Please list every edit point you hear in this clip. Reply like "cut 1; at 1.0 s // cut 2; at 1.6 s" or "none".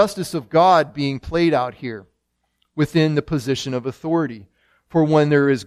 none

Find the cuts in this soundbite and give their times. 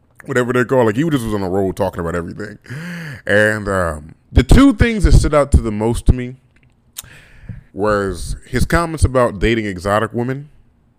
cut 1; at 4.2 s // cut 2; at 7.7 s

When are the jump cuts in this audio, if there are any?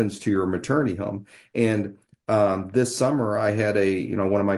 none

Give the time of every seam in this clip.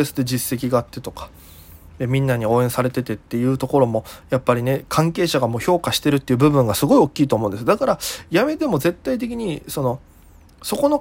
none

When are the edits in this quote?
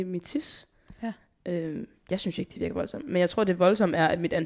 none

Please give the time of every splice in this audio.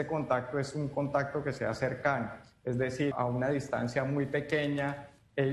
cut 1; at 3.1 s

